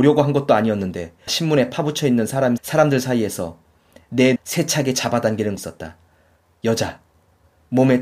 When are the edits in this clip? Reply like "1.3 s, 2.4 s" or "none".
1.3 s, 2.6 s, 4.4 s, 5.6 s